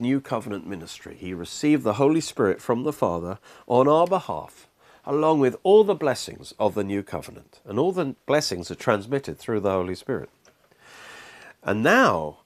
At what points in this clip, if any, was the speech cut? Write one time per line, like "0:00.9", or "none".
none